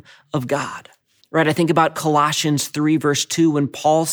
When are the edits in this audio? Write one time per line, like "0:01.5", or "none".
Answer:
0:01.2

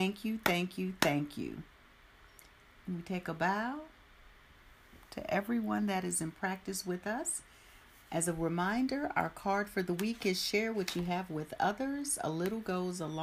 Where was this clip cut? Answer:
none

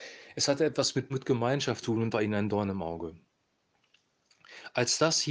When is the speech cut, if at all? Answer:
0:01.1
0:01.8
0:02.1

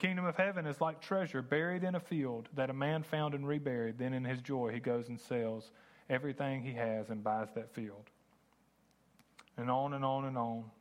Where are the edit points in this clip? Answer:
none

